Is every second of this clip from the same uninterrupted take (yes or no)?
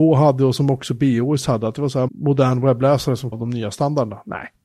no